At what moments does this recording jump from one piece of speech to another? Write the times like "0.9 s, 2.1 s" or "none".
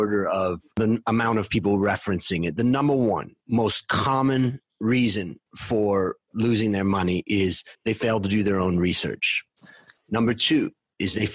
3.4 s, 5.5 s, 7.7 s